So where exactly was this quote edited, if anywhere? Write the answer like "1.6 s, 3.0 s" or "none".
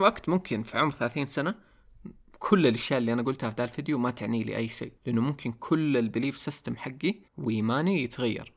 5.0 s, 7.3 s

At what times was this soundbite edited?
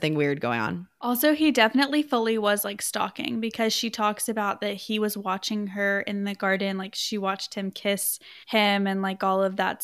8.4 s

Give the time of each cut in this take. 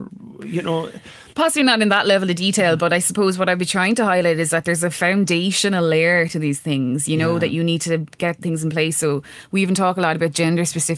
1.3 s

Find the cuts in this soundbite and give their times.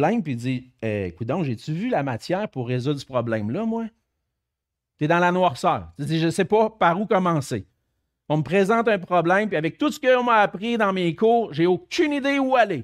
none

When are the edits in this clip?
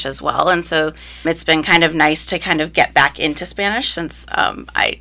1.2 s

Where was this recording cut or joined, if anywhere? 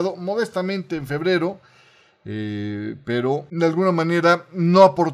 none

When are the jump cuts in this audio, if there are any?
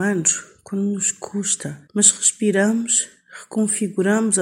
1.9 s

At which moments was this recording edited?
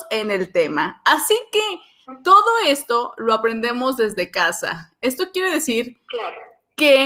none

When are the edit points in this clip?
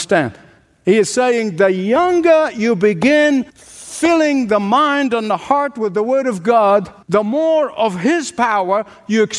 3.5 s, 7.0 s

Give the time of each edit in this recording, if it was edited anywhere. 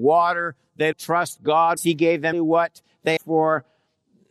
0.9 s, 1.8 s, 2.3 s, 3.2 s

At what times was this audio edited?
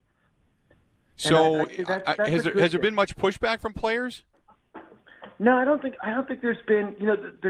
none

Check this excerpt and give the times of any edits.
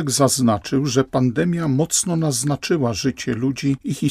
none

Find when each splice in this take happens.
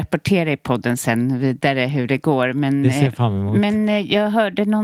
none

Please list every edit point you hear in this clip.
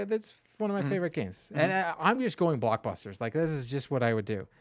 none

